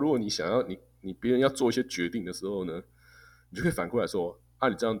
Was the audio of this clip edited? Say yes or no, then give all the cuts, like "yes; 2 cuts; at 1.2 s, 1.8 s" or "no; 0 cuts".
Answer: no; 0 cuts